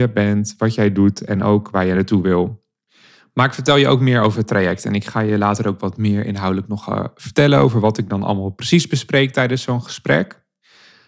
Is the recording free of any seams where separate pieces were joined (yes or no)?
yes